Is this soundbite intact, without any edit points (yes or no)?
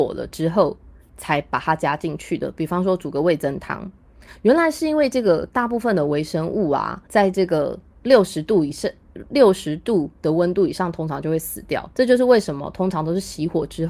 no